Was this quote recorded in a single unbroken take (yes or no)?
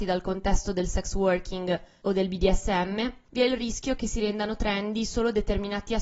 yes